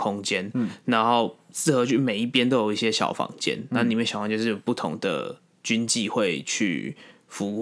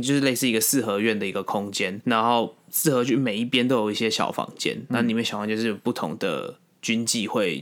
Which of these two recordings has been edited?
second; 1 cut; at 2.0 s

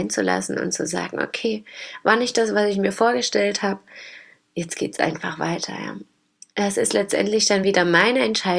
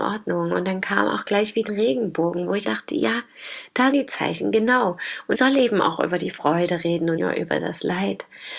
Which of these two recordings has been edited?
second; 5 cuts; at 1.7 s, 2.6 s, 3.9 s, 5.3 s, 7.2 s

